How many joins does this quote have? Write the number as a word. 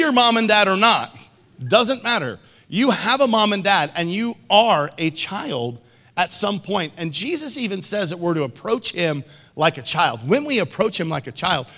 zero